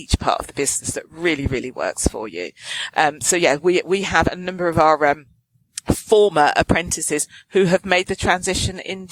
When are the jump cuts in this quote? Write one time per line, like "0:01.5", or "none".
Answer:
none